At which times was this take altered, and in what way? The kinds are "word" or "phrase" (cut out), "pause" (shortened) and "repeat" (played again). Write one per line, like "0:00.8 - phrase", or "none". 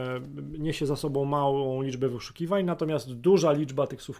none